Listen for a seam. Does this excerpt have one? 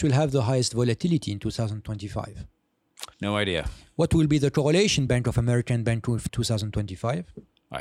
yes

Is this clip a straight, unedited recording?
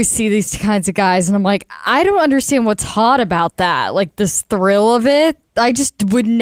yes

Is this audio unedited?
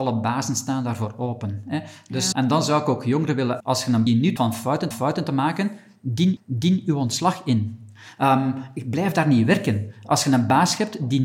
no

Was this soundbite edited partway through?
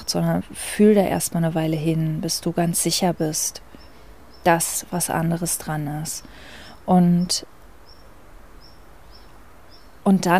no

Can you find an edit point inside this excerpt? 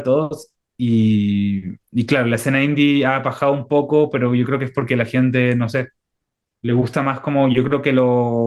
yes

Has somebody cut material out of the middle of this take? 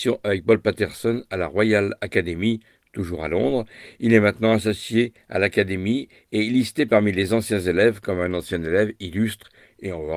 no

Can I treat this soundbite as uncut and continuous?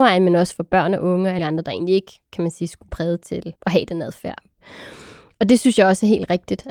no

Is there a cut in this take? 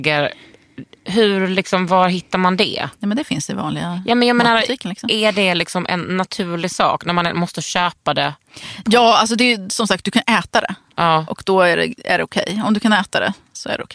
no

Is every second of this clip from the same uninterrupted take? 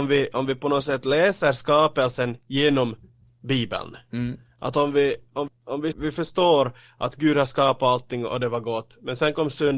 no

